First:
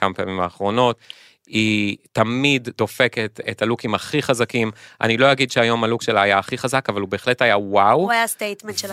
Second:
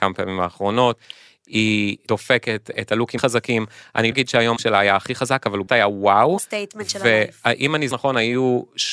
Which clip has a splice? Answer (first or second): second